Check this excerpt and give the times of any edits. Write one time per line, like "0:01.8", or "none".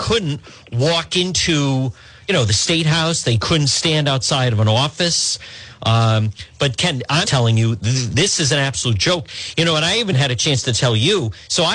0:07.2
0:10.1